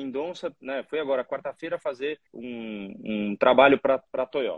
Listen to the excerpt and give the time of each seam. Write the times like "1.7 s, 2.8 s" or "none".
2.3 s